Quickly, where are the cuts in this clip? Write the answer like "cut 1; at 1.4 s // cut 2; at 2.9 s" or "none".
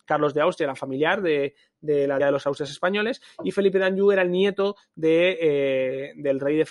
cut 1; at 2.2 s